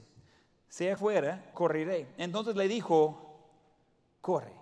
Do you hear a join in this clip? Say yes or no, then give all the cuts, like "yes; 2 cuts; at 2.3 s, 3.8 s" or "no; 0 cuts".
yes; 2 cuts; at 1.0 s, 1.5 s